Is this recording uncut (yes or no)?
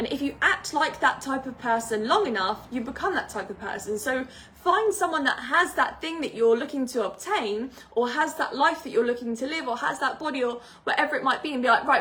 yes